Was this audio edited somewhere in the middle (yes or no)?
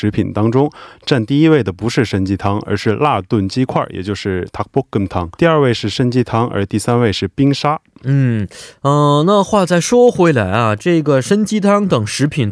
yes